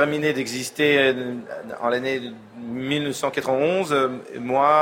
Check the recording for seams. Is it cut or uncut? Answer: uncut